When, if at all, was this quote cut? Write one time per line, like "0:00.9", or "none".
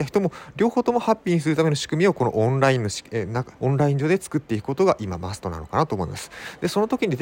0:03.5